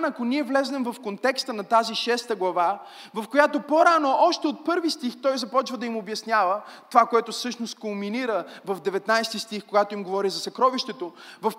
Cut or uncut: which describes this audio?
uncut